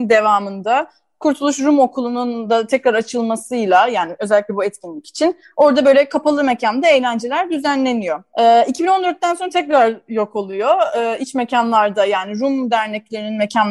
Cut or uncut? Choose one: uncut